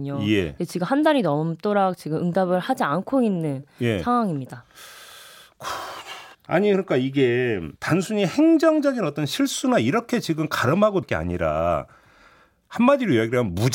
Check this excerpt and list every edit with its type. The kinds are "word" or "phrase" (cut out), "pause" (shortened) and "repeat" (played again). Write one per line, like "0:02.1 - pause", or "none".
0:06.3 - pause
0:07.8 - pause
0:11.0 - word